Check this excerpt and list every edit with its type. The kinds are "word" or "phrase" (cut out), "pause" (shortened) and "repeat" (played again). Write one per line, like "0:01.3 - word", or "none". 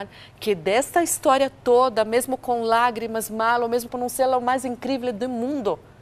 0:03.9 - phrase